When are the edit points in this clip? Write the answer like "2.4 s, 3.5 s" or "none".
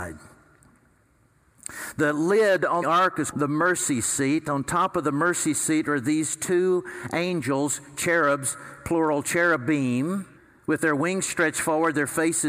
2.8 s, 3.3 s, 10.4 s